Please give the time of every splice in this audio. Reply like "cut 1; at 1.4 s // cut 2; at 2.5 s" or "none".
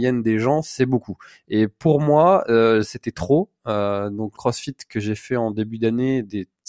cut 1; at 4.3 s

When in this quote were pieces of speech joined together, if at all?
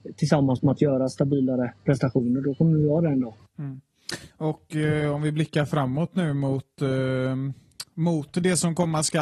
cut 1; at 3.4 s

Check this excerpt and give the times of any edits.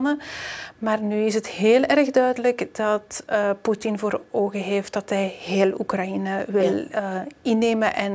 none

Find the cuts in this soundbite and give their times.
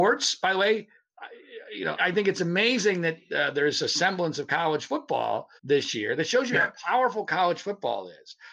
cut 1; at 2.0 s // cut 2; at 5.6 s

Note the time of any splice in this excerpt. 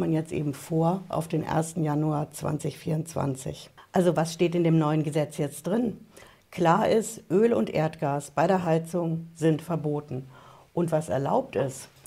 none

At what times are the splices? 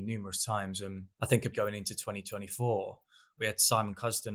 cut 1; at 1.1 s // cut 2; at 1.5 s

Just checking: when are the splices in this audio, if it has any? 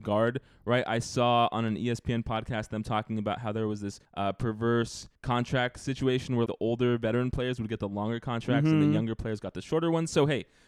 cut 1; at 4.0 s // cut 2; at 5.2 s // cut 3; at 6.5 s

